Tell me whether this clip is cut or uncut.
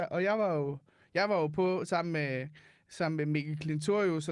uncut